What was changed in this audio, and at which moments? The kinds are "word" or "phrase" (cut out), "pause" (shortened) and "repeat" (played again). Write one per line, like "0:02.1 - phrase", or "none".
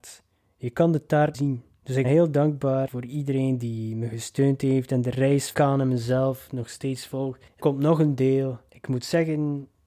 0:01.3 - phrase
0:02.0 - word
0:02.9 - word
0:05.5 - word
0:07.6 - word